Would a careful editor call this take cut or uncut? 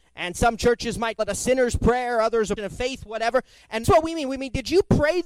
cut